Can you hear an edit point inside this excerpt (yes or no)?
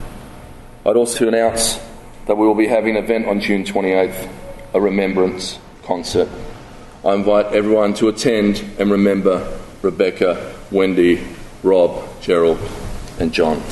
yes